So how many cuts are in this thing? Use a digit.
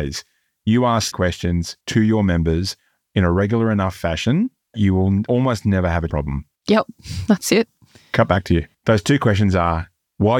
4